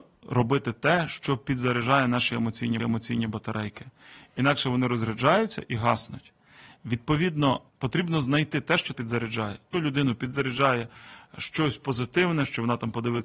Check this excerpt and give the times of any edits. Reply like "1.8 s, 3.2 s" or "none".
2.8 s, 7.7 s, 8.9 s, 9.7 s